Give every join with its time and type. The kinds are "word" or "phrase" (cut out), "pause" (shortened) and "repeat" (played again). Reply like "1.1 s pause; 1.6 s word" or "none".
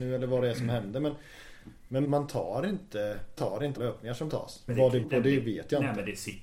2.0 s word; 3.4 s word; 3.8 s word; 4.3 s word; 4.7 s word; 5.0 s word